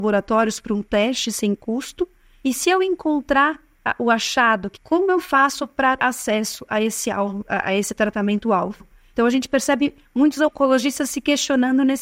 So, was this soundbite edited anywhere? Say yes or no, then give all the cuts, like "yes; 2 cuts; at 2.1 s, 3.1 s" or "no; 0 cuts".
yes; 2 cuts; at 4.8 s, 6.0 s